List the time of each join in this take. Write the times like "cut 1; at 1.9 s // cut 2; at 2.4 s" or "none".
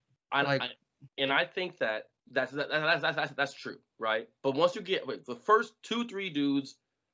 cut 1; at 1.1 s // cut 2; at 2.2 s // cut 3; at 4.4 s